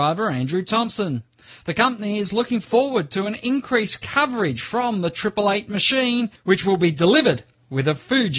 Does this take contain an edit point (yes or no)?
no